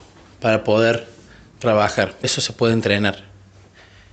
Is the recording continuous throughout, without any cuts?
no; 1 cut; at 2.2 s

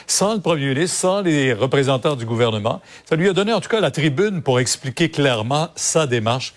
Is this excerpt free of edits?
yes; 0 cuts

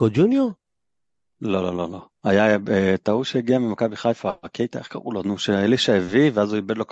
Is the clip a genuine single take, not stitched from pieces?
yes; 0 cuts

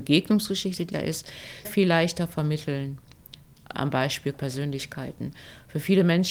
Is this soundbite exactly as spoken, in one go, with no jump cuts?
no; 4 cuts; at 0.9 s, 1.6 s, 3.7 s, 4.3 s

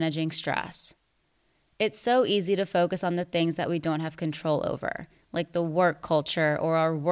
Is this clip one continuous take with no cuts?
yes; 0 cuts

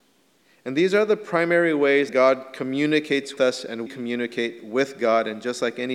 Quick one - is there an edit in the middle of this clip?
yes; 3 cuts; at 2.1 s, 3.4 s, 3.9 s

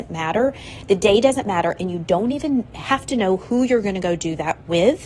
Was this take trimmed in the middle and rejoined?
no; 0 cuts

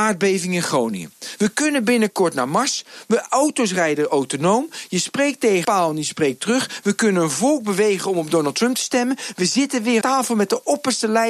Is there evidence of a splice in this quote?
yes; 2 cuts; at 5.6 s, 10.0 s

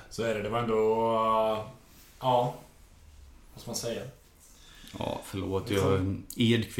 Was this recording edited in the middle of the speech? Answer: no; 0 cuts

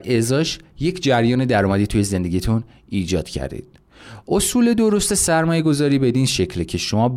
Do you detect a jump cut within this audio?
no; 0 cuts

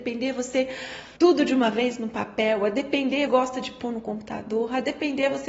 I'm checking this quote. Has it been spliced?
yes; 2 cuts; at 1.2 s, 3.3 s

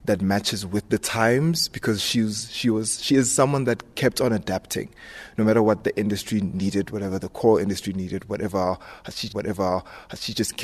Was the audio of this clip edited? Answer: yes; 1 cut; at 9.3 s

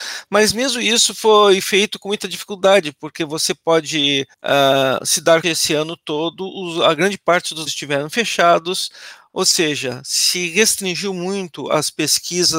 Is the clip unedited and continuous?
no; 3 cuts; at 4.3 s, 5.4 s, 7.7 s

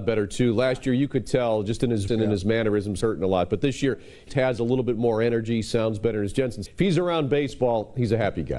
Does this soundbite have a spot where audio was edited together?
yes; 4 cuts; at 2.1 s, 3.0 s, 4.3 s, 6.7 s

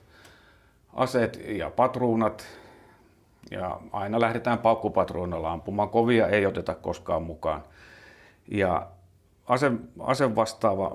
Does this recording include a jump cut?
no; 0 cuts

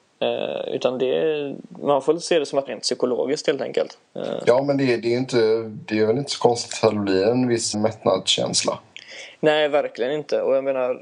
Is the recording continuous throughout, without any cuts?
no; 3 cuts; at 2.7 s, 4.1 s, 7.7 s

